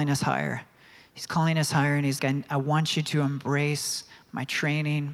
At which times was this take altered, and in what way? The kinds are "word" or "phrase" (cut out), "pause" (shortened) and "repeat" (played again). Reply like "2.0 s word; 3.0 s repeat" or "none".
2.2 s word